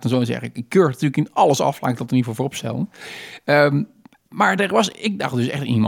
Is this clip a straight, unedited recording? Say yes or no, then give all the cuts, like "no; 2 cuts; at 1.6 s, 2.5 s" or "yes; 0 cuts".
yes; 0 cuts